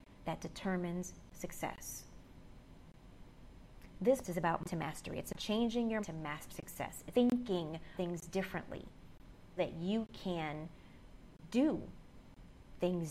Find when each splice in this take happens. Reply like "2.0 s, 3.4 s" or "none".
1.3 s, 4.2 s, 4.6 s, 5.3 s, 6.0 s, 6.5 s, 7.1 s, 8.0 s, 9.6 s